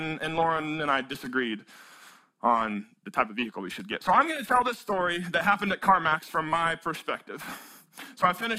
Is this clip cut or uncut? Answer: uncut